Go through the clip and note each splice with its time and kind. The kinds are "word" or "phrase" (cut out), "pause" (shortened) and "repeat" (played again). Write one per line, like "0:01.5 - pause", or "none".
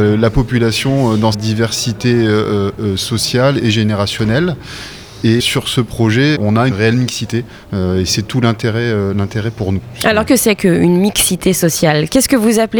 0:01.3 - word
0:03.6 - word
0:05.4 - word
0:06.4 - word
0:06.7 - word
0:10.3 - word